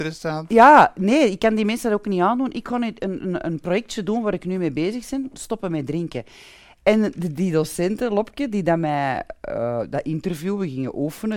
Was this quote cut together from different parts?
no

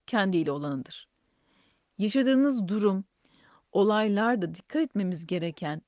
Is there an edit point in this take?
no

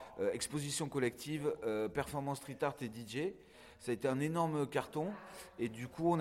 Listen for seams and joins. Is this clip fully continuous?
yes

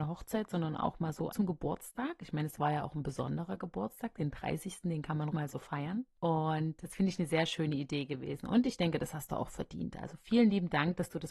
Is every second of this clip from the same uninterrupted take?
no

